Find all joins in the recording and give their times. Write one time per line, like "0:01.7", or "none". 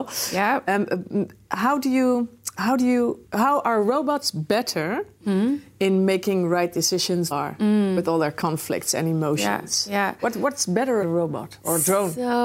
0:02.6
0:03.3
0:07.3
0:11.0